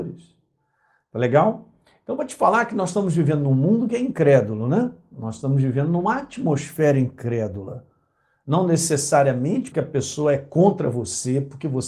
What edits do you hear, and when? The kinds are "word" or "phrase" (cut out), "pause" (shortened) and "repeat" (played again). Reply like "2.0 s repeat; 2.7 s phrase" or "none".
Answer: 9.7 s word